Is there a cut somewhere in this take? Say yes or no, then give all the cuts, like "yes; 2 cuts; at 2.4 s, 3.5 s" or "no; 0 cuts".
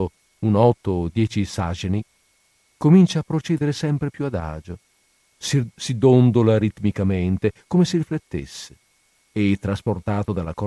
no; 0 cuts